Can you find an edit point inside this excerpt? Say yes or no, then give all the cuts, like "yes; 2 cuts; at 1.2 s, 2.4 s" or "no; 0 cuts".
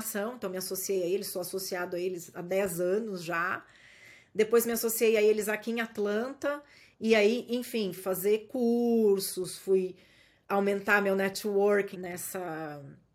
yes; 2 cuts; at 8.0 s, 11.9 s